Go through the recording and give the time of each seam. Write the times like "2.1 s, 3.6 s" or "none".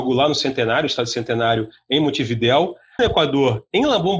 3.0 s

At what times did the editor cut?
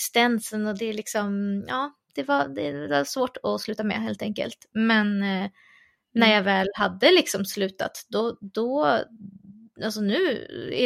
none

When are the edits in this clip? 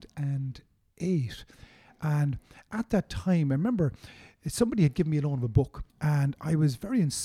5.9 s

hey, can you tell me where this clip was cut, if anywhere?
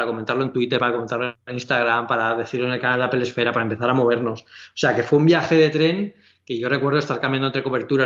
none

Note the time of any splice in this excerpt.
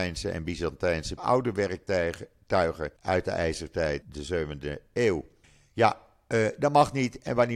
1.2 s, 3.0 s, 4.0 s, 5.4 s

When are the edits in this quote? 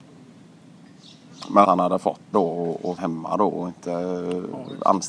1.6 s, 2.3 s, 3.0 s

